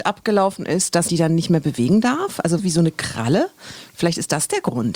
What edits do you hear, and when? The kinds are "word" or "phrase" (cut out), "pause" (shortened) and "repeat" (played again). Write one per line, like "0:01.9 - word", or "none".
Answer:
0:01.1 - word
0:02.6 - word